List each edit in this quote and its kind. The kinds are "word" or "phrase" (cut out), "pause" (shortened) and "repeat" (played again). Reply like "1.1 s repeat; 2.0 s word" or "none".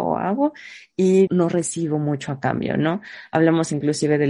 1.3 s word